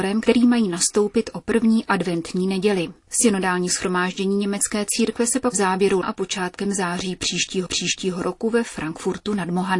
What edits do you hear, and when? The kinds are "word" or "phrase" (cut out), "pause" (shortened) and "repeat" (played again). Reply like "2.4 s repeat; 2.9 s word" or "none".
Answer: 5.5 s word; 6.0 s word; 7.7 s repeat